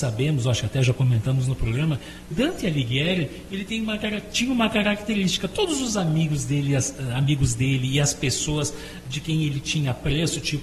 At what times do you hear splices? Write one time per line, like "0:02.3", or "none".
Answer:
0:02.3